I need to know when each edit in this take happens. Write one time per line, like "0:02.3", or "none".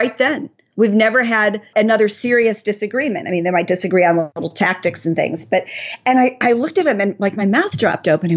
none